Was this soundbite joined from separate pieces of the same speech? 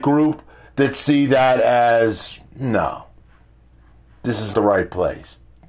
yes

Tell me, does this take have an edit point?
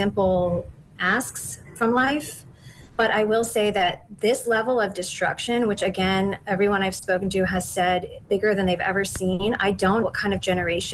yes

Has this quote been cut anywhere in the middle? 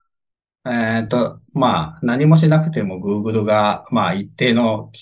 no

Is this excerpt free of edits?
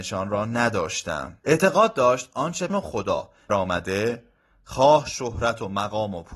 no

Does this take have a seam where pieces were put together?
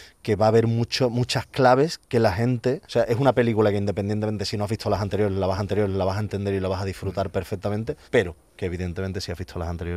yes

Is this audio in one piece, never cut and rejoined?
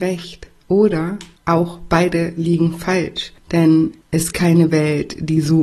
no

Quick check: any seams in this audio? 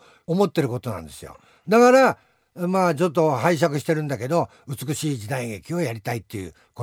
no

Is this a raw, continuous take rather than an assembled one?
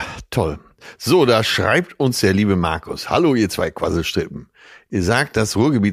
yes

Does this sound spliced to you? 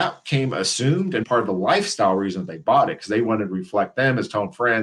yes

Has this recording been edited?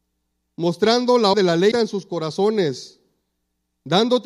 yes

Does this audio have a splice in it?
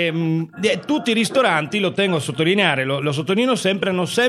no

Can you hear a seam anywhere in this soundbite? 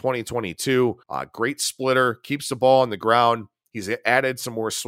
yes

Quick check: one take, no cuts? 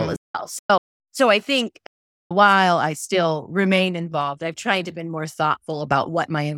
yes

